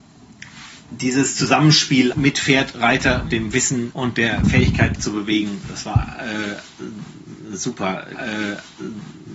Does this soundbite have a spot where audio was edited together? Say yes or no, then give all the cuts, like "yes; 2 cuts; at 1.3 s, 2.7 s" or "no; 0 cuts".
yes; 5 cuts; at 2.1 s, 3.3 s, 3.9 s, 5.0 s, 8.2 s